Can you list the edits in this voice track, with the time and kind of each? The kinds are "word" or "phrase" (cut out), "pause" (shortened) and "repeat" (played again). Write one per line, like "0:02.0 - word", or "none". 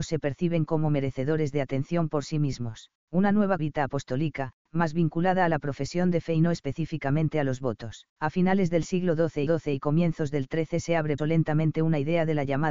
0:03.0 - pause
0:03.6 - phrase
0:04.6 - pause
0:08.1 - pause
0:09.5 - repeat
0:11.2 - word